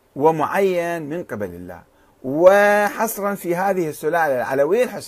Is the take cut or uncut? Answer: uncut